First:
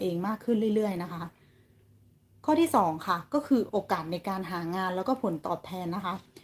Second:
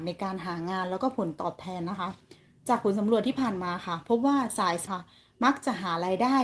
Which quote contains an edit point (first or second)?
second